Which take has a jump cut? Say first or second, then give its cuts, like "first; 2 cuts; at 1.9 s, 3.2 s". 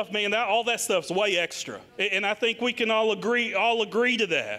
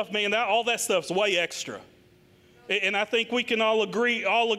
first; 1 cut; at 1.9 s